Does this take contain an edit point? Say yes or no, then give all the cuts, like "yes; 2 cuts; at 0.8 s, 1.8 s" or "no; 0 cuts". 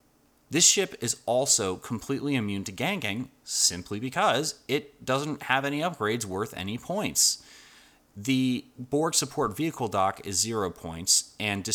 no; 0 cuts